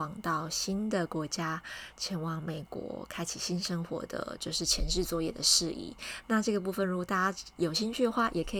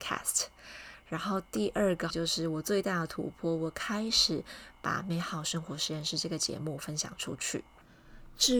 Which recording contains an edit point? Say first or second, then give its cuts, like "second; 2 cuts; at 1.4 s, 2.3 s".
second; 1 cut; at 2.1 s